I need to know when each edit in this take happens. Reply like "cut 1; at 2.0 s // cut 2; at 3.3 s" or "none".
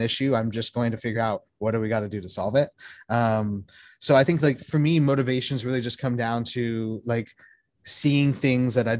none